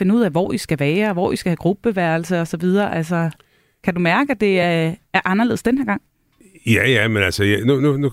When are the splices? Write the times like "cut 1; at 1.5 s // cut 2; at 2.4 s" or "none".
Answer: none